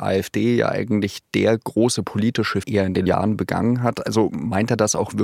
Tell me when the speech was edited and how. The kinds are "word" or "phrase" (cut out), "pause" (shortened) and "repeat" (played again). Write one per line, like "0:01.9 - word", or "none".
0:02.6 - phrase
0:03.1 - word